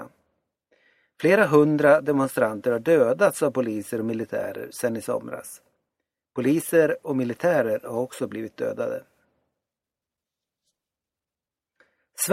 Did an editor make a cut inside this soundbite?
no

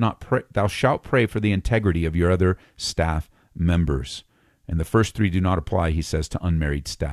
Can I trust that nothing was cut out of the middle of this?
yes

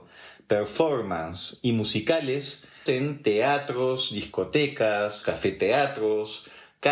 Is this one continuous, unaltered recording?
no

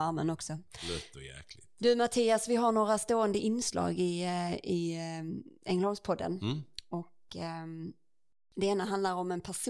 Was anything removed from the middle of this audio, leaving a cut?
no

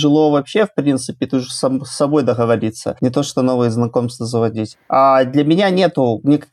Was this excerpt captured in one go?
yes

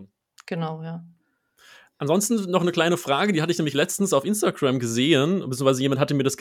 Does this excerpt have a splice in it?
no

